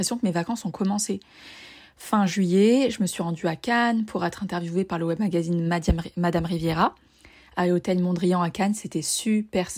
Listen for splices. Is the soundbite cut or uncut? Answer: uncut